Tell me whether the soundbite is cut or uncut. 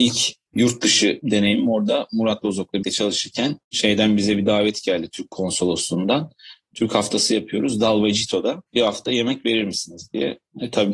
cut